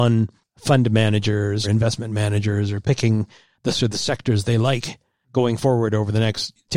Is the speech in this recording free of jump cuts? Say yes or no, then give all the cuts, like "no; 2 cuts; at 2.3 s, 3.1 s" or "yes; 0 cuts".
no; 4 cuts; at 1.6 s, 2.8 s, 3.7 s, 4.4 s